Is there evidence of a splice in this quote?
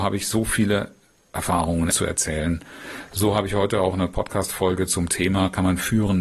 yes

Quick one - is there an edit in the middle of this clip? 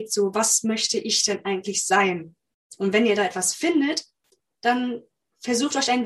no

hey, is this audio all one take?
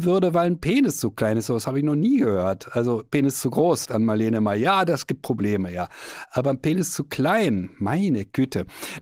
no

